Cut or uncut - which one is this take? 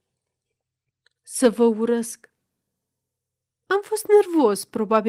uncut